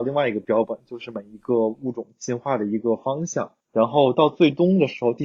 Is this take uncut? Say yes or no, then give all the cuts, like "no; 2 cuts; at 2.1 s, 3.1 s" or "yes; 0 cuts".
no; 1 cut; at 3.6 s